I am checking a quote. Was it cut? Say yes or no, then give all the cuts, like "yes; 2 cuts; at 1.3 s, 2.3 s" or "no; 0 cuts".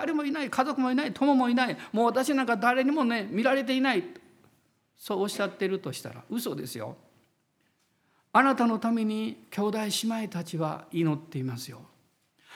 no; 0 cuts